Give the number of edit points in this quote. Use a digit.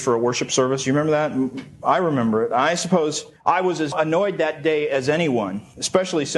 1